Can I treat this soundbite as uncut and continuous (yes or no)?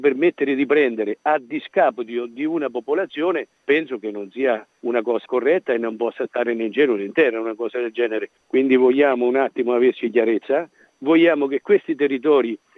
no